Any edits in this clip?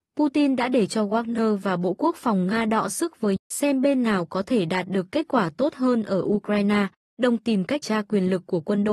yes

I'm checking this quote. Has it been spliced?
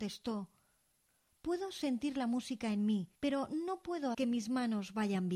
yes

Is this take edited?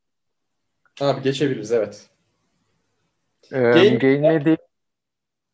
no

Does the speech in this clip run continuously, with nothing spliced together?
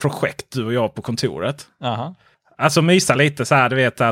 yes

